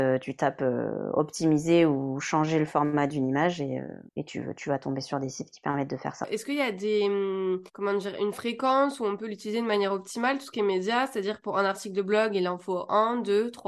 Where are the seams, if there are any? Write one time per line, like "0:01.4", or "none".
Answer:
0:04.1
0:07.7